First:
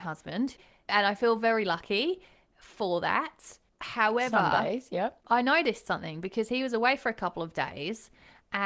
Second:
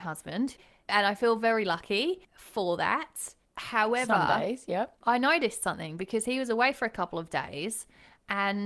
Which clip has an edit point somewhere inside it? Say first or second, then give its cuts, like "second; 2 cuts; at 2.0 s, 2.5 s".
second; 1 cut; at 2.2 s